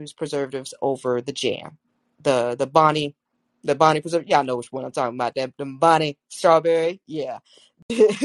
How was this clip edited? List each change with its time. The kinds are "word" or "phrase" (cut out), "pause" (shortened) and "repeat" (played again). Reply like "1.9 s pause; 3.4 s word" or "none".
none

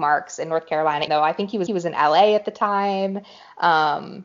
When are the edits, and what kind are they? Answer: 1.1 s word; 1.7 s repeat

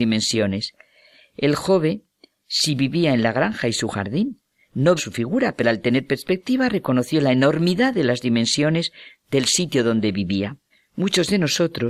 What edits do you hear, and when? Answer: 5.0 s word; 10.7 s pause

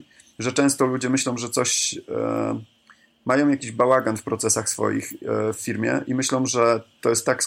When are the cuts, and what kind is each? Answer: none

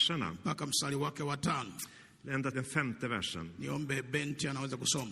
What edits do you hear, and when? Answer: 2.5 s word

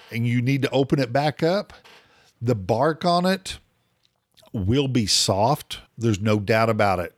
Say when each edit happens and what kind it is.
5.9 s pause

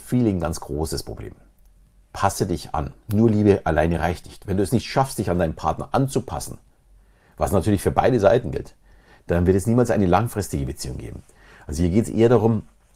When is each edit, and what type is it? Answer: none

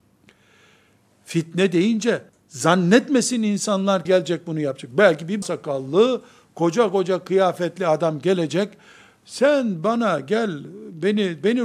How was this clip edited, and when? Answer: 2.3 s pause; 4.1 s phrase; 5.4 s word

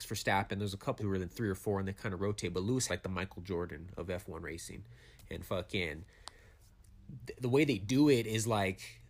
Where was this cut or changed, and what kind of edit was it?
1.0 s word; 2.9 s word

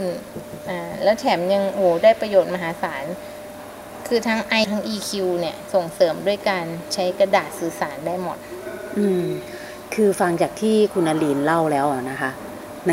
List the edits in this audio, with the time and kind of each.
4.6 s word

